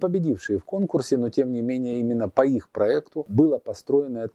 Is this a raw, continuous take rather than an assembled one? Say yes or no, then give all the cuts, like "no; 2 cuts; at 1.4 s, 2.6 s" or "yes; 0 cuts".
yes; 0 cuts